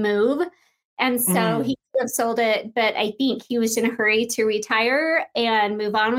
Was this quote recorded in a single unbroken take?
no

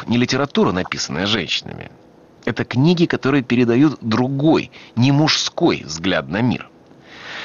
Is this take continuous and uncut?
yes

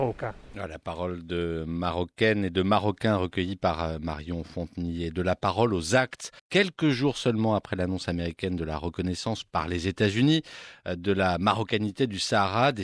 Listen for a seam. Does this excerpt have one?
yes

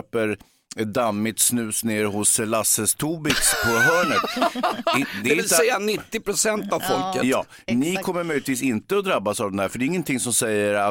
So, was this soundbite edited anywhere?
no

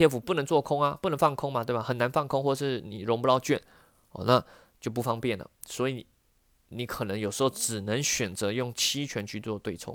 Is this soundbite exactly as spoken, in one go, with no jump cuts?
yes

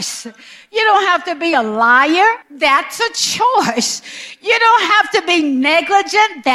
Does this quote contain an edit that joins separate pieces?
yes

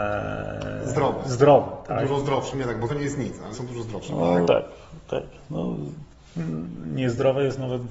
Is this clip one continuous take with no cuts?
no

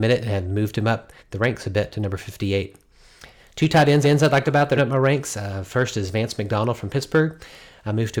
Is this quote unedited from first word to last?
no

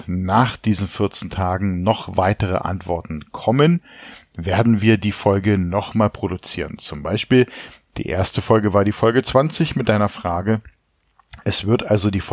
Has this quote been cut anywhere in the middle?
no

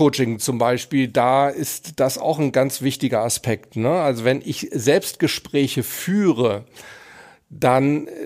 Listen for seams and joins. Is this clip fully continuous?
yes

